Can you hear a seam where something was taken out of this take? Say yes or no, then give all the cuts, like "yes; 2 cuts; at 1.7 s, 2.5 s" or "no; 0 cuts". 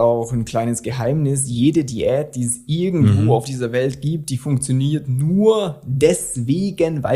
no; 0 cuts